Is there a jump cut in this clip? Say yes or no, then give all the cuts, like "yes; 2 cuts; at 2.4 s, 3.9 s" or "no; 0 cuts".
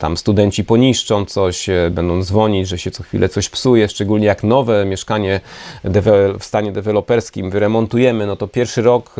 no; 0 cuts